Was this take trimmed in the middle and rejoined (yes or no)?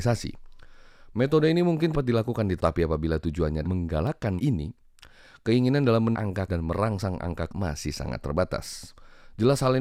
yes